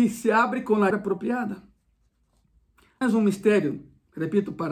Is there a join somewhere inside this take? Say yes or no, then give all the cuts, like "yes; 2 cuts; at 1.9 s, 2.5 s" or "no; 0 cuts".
yes; 2 cuts; at 0.9 s, 3.0 s